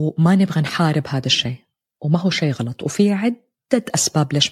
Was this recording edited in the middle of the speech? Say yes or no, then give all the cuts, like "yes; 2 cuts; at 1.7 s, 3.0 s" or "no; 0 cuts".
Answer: no; 0 cuts